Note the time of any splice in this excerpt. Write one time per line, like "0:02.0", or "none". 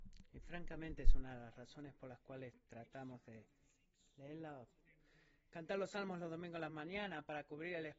none